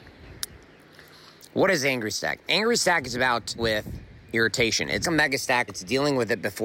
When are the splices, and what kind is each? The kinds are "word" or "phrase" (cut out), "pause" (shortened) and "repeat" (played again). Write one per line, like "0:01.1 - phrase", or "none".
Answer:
0:03.6 - word
0:05.0 - word
0:05.7 - word